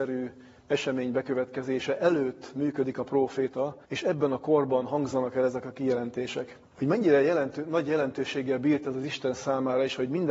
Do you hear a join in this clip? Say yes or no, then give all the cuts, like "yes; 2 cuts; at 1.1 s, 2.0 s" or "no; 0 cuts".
yes; 2 cuts; at 3.8 s, 6.7 s